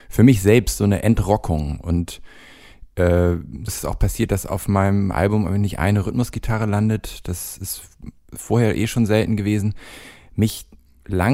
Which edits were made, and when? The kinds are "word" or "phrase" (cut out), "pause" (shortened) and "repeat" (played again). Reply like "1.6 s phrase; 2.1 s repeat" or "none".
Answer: 3.7 s word